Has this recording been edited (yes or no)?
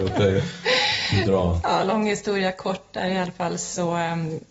no